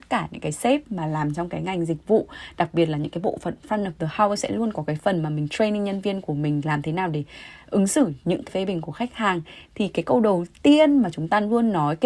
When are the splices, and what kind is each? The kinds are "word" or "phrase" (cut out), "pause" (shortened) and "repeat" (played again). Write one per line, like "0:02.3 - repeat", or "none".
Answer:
0:08.5 - word